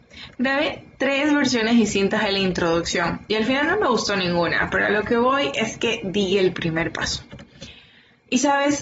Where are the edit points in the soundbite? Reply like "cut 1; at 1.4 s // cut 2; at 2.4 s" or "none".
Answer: none